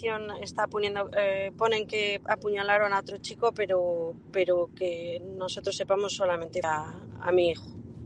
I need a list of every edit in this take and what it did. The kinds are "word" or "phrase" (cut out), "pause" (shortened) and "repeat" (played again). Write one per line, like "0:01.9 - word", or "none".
0:06.6 - word